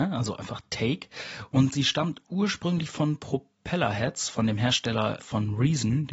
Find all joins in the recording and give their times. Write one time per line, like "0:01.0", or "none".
0:05.2